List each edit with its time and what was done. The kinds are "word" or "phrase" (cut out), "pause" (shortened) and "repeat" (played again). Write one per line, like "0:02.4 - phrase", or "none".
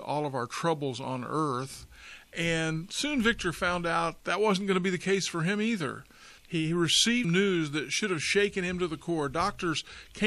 0:04.2 - word
0:06.4 - pause
0:07.2 - word